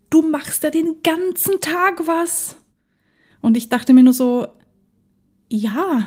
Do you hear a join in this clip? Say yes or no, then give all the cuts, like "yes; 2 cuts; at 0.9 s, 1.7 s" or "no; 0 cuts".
no; 0 cuts